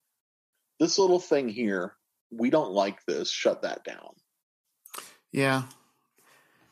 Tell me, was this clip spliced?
no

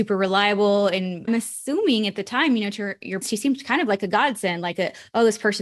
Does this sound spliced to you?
yes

